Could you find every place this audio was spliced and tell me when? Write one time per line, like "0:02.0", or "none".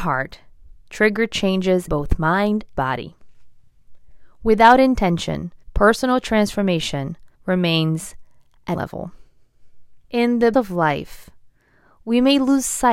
0:01.9
0:02.7
0:05.6
0:07.3
0:08.7
0:10.0
0:10.5